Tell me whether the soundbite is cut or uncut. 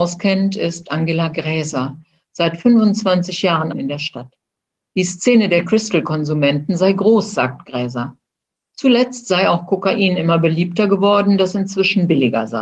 cut